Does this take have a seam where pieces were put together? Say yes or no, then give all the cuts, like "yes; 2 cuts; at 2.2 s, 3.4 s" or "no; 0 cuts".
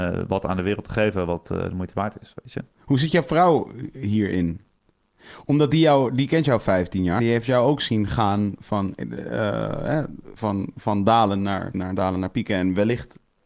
yes; 3 cuts; at 7.2 s, 10.4 s, 11.7 s